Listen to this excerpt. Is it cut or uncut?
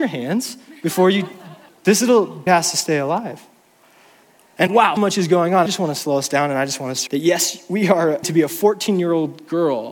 cut